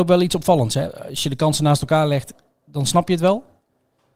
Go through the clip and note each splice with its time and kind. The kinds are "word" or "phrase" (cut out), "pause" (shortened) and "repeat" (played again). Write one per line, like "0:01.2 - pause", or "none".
none